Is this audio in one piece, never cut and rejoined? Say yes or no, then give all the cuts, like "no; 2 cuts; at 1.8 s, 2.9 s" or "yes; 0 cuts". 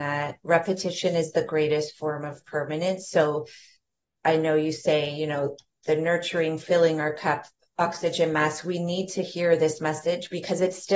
yes; 0 cuts